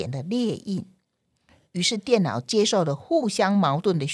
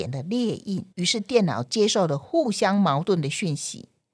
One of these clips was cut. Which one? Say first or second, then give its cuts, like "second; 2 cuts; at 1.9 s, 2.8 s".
second; 1 cut; at 0.9 s